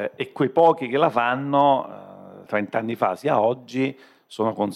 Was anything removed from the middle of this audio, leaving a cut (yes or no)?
yes